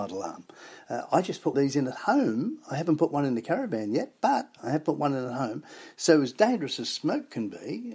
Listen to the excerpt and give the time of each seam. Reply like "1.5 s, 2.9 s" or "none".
1.5 s